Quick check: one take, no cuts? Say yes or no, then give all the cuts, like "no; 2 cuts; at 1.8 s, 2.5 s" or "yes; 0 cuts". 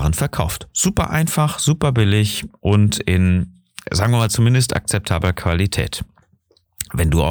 yes; 0 cuts